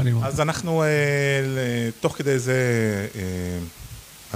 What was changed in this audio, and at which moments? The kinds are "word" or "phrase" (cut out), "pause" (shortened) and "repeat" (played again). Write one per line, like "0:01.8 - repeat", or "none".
none